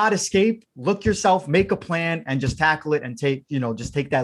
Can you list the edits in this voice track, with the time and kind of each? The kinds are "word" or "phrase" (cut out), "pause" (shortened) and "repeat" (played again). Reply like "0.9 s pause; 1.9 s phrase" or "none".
none